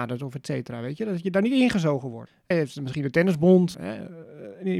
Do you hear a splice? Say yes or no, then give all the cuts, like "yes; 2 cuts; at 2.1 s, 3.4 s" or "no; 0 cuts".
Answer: yes; 2 cuts; at 2.5 s, 3.7 s